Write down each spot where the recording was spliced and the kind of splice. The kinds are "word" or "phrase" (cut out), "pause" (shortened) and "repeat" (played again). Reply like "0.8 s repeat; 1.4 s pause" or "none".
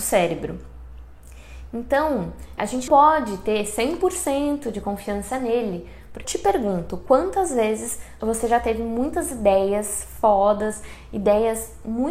2.6 s word; 2.9 s word; 6.2 s word; 8.2 s word

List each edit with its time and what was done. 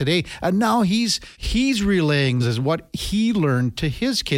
1.3 s pause; 2.4 s phrase

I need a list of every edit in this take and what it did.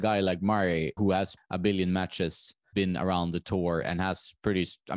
1.0 s word; 1.4 s word; 2.7 s word

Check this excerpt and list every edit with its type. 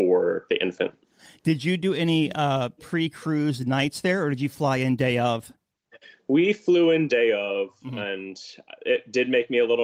none

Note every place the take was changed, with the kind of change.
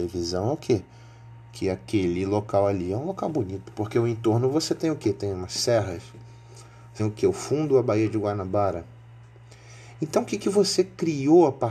7.0 s word

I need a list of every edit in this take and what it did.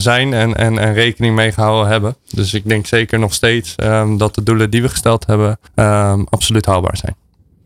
5.7 s pause

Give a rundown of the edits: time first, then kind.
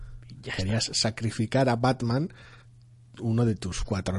none

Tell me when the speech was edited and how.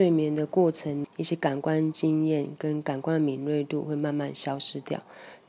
none

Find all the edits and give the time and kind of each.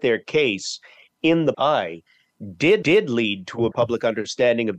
1.5 s word; 2.8 s repeat; 3.7 s word

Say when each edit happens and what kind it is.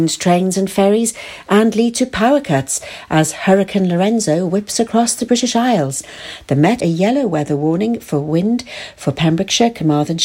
6.8 s phrase

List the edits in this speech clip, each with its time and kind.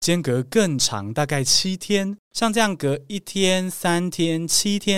2.2 s pause

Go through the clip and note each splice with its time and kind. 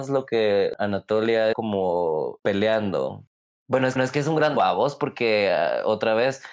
1.5 s word; 4.0 s repeat; 4.6 s word

